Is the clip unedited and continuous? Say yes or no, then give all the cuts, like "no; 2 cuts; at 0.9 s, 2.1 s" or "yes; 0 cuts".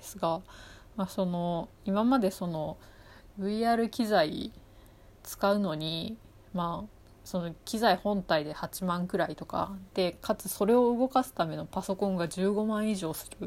yes; 0 cuts